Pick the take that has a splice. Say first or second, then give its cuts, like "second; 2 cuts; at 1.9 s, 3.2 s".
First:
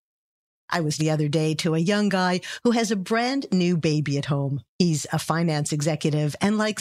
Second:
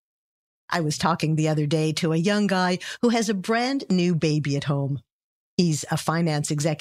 first; 2 cuts; at 1.0 s, 4.7 s